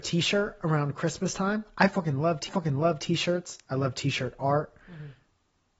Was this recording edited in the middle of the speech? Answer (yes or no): yes